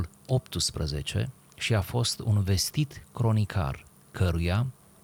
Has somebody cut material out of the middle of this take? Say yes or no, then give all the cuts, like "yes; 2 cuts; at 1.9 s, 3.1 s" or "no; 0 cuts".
no; 0 cuts